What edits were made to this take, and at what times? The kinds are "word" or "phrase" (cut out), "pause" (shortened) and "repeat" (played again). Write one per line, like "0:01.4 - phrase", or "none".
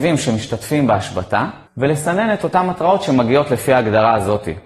0:01.7 - pause

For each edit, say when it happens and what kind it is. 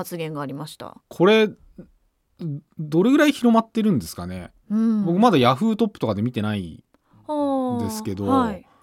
0:01.0 - pause
0:04.6 - pause

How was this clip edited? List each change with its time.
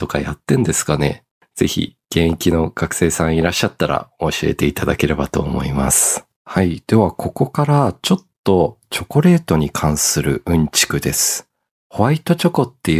0:01.4 - pause
0:06.3 - pause
0:11.7 - pause

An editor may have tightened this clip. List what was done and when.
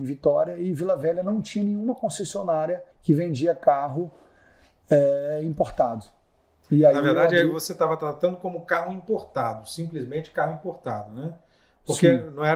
0:02.9 - pause

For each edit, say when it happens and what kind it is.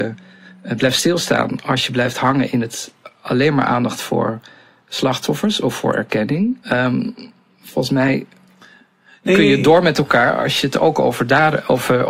0:06.6 - pause

